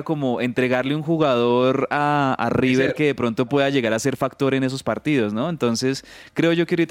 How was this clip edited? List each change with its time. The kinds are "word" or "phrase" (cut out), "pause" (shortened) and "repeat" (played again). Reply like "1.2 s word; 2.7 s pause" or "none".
none